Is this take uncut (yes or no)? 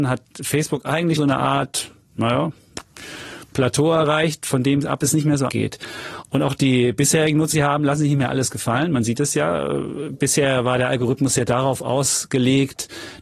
no